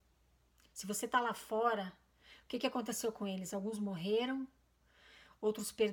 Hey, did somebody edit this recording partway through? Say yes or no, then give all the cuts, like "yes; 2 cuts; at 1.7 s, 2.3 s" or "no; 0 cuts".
no; 0 cuts